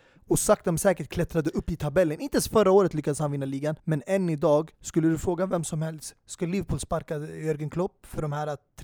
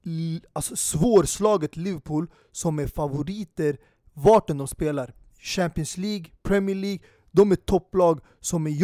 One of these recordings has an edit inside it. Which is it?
first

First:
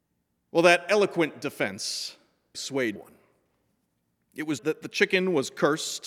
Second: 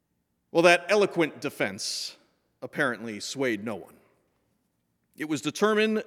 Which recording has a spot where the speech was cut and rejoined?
first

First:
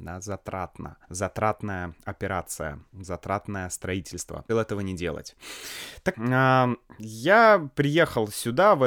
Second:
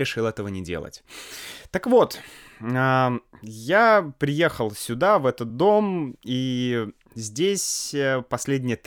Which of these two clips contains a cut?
first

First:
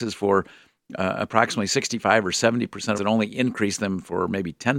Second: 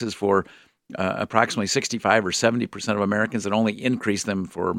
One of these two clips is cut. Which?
first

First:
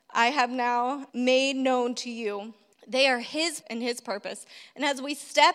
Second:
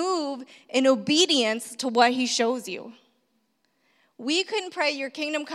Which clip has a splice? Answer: first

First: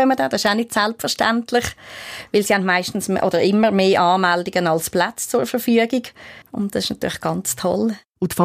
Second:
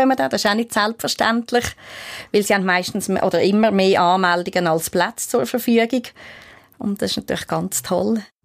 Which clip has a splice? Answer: first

